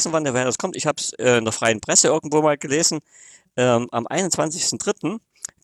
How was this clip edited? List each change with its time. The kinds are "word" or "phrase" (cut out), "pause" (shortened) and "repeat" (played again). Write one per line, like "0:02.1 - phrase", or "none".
none